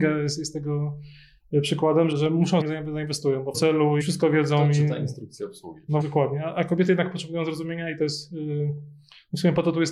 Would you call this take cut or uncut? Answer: cut